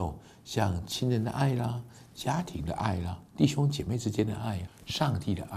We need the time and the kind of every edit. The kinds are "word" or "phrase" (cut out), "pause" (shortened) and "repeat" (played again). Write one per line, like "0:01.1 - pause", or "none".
0:03.3 - pause
0:04.7 - word